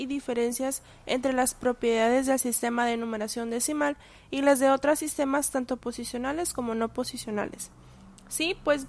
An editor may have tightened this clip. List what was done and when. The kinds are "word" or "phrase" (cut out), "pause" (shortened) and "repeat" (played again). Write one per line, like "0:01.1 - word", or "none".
none